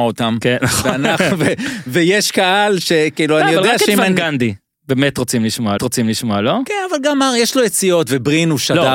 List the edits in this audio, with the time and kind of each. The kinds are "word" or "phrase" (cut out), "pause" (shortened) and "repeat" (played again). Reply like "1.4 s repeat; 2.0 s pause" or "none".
5.8 s repeat